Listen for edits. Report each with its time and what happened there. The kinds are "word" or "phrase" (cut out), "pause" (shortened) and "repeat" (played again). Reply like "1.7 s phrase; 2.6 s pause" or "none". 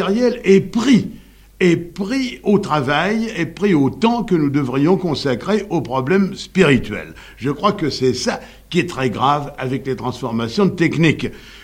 none